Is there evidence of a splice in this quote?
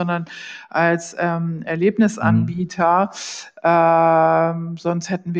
no; 0 cuts

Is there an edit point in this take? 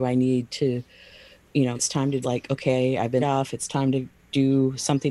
yes; 3 cuts; at 1.7 s, 2.2 s, 3.2 s

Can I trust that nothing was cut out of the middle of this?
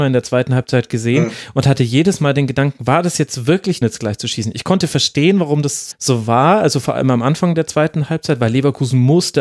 no; 2 cuts; at 3.8 s, 5.9 s

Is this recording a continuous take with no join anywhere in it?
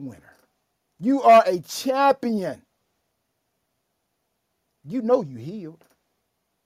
yes; 0 cuts

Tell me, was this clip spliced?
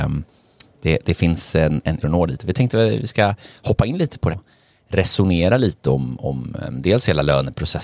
yes; 2 cuts; at 2.0 s, 4.3 s

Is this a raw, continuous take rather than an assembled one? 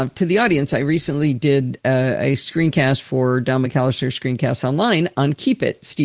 yes; 0 cuts

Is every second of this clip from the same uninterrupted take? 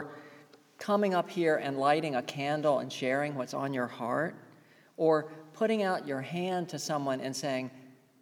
yes; 0 cuts

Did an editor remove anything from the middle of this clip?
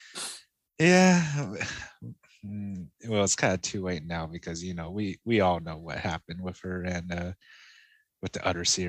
no; 0 cuts

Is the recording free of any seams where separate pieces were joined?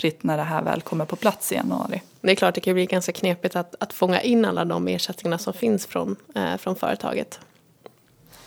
yes; 0 cuts

